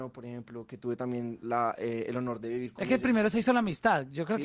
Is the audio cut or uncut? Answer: uncut